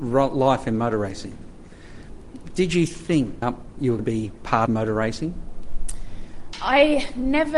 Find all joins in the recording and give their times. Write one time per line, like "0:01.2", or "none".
0:03.4
0:04.0
0:04.7